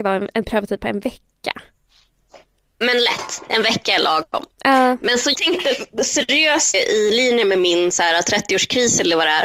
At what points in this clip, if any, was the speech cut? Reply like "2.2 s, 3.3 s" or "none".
5.3 s, 6.7 s